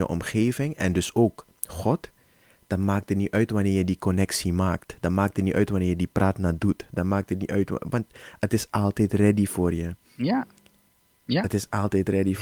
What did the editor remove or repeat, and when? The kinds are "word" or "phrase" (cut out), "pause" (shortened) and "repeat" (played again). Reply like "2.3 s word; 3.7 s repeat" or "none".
none